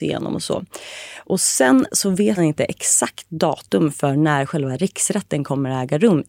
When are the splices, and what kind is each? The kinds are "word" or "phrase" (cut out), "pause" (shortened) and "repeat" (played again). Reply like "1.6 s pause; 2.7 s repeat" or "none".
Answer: 2.4 s word